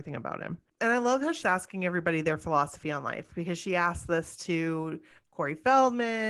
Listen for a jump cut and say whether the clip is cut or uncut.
cut